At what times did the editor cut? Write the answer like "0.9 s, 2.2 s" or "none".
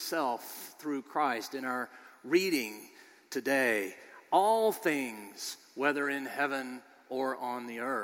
none